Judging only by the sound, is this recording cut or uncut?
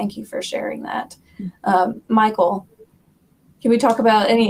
uncut